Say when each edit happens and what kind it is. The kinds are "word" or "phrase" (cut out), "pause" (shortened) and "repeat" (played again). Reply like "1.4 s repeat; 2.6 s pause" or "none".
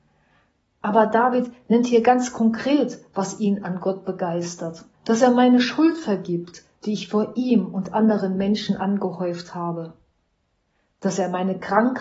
4.9 s pause